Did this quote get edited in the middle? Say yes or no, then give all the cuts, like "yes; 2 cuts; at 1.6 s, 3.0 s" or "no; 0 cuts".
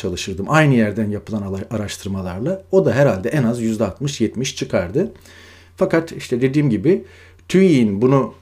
no; 0 cuts